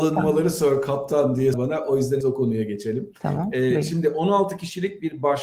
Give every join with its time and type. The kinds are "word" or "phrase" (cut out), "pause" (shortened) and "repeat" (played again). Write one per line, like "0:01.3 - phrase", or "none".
0:01.5 - word
0:02.2 - word